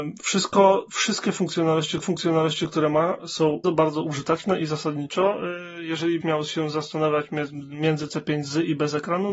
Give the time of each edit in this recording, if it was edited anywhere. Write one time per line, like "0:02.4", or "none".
0:02.0
0:03.6
0:06.2